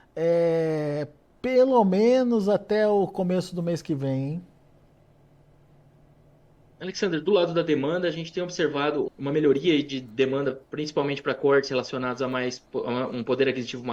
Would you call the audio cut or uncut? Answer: cut